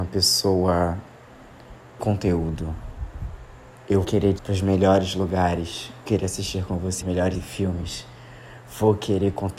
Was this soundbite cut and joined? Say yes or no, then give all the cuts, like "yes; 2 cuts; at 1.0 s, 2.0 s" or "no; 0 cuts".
yes; 6 cuts; at 2.0 s, 4.0 s, 4.4 s, 6.0 s, 7.0 s, 7.3 s